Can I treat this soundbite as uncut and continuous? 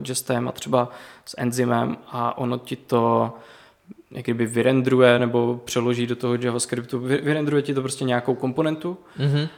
yes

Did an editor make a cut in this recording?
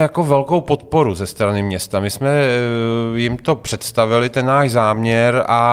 no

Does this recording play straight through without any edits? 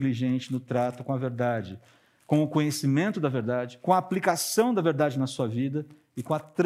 yes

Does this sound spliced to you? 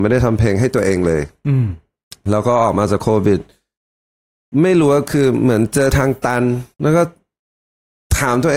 yes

